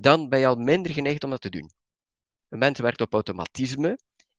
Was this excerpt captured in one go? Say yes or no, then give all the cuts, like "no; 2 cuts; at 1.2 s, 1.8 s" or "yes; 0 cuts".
yes; 0 cuts